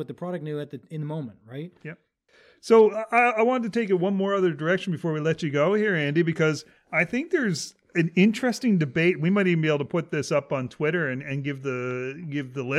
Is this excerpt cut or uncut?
uncut